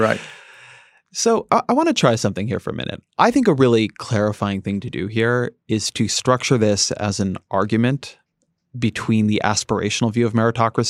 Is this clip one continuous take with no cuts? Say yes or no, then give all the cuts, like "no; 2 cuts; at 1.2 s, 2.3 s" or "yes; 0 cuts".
yes; 0 cuts